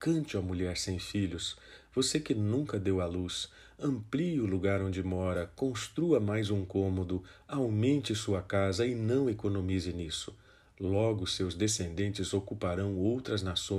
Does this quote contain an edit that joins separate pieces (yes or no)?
no